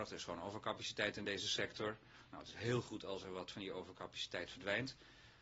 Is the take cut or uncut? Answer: uncut